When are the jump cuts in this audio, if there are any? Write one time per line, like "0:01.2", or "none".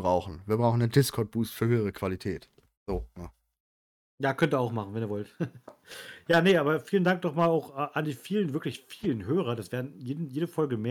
none